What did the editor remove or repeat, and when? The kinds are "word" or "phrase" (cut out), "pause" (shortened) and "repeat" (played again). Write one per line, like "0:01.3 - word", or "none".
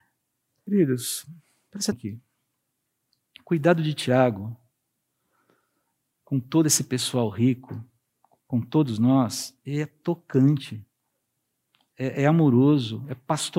0:01.9 - word

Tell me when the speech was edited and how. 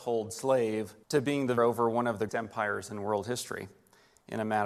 0:01.0 - pause
0:01.6 - word
0:02.3 - word

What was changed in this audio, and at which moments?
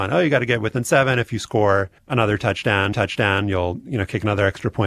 0:02.0 - pause
0:02.9 - repeat

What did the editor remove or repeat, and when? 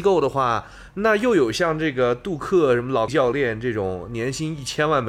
0:03.1 - word

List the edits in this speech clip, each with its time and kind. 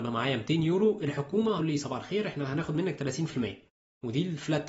0:01.6 - phrase

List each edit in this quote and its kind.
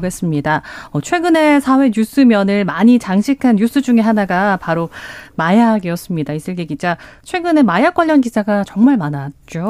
none

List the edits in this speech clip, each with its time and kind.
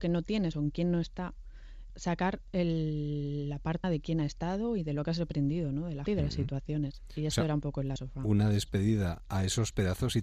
0:01.9 - word
0:03.8 - word
0:06.1 - word
0:08.0 - word

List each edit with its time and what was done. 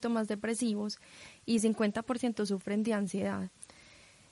none

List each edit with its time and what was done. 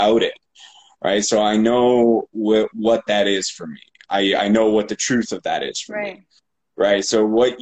none

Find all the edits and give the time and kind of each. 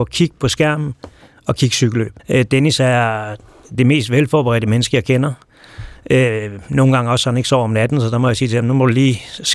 0:02.2 - pause

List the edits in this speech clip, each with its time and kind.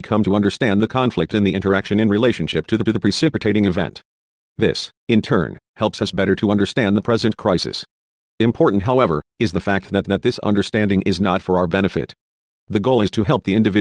0:02.9 - repeat
0:10.0 - repeat

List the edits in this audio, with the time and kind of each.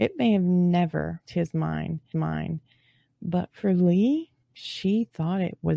0:01.2 - word
0:02.1 - repeat
0:04.4 - pause

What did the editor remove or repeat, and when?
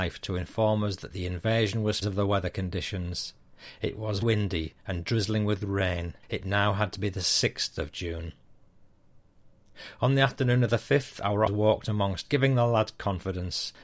0:02.0 - phrase
0:04.2 - word
0:06.2 - pause
0:11.5 - word
0:12.2 - word

